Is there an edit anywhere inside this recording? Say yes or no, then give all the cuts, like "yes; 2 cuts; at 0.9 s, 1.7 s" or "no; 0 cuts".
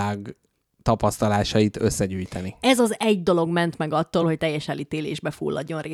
no; 0 cuts